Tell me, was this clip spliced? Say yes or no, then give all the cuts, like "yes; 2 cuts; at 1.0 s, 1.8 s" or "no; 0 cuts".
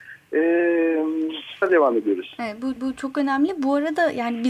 yes; 2 cuts; at 1.6 s, 2.8 s